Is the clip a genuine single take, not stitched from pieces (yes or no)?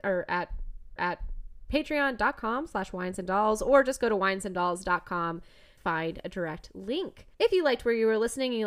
no